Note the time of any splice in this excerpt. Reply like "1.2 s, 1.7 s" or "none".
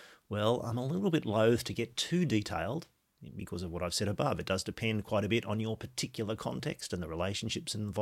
none